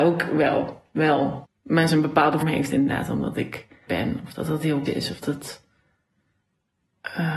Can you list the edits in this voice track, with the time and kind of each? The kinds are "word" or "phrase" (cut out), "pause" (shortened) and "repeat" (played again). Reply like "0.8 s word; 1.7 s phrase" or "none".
1.4 s word; 1.9 s word; 2.4 s word; 3.9 s word; 4.9 s word; 5.2 s word